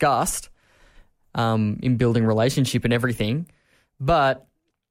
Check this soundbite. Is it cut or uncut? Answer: uncut